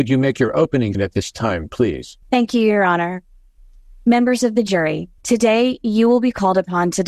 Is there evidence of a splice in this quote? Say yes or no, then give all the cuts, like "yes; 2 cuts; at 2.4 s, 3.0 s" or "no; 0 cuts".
yes; 3 cuts; at 0.9 s, 2.2 s, 5.2 s